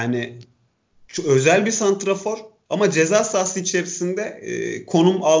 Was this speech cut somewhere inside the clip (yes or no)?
no